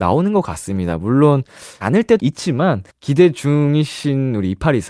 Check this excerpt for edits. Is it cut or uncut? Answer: cut